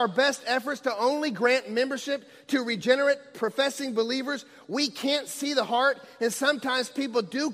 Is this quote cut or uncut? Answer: uncut